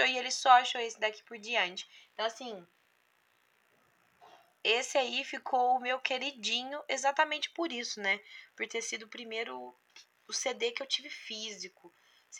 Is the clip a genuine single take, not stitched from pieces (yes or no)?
yes